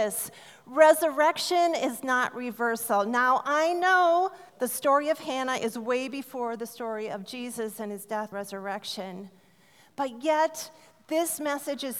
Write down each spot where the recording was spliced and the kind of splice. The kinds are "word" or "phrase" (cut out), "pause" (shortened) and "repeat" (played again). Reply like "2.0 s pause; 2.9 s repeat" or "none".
4.5 s pause; 8.3 s word